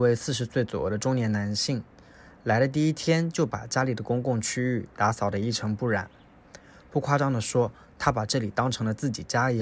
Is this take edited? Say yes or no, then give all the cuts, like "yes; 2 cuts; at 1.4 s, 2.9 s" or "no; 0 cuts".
no; 0 cuts